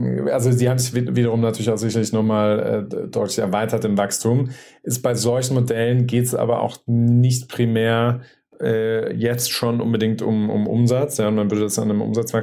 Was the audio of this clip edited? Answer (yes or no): no